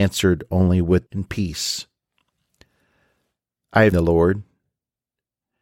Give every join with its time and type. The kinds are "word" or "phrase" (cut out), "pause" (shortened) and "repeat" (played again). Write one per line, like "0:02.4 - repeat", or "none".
0:01.1 - word
0:03.9 - word